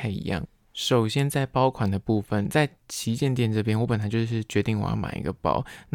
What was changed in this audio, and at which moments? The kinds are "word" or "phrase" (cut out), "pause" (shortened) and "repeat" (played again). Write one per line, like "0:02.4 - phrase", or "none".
none

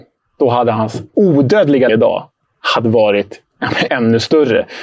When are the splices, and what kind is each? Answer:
0:01.1 - word
0:01.9 - phrase
0:03.9 - word

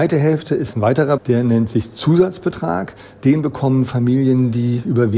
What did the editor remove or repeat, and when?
0:01.2 - phrase

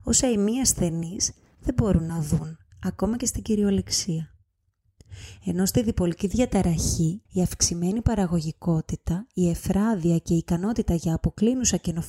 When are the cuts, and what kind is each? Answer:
0:07.3 - pause

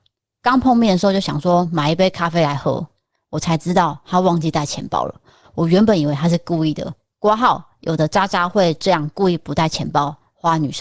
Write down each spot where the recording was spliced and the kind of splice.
none

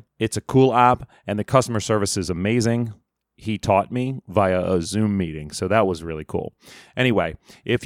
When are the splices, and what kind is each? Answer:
none

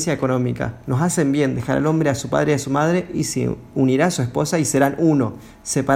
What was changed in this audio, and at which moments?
none

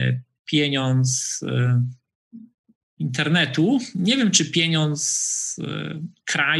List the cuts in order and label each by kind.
none

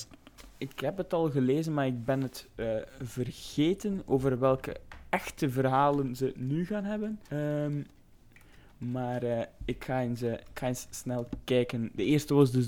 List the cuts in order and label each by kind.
0:07.3 - pause

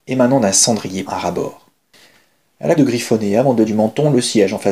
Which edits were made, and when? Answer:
0:01.1 - word
0:02.8 - word
0:03.7 - word

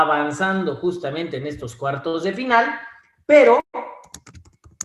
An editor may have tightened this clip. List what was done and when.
none

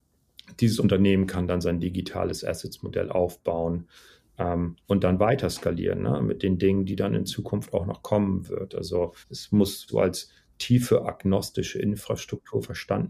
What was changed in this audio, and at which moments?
0:04.8 - word
0:09.2 - pause
0:09.9 - word

